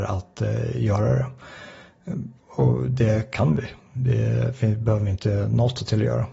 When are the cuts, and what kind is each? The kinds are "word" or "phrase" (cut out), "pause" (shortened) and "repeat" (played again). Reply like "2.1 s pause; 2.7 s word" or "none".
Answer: 2.4 s pause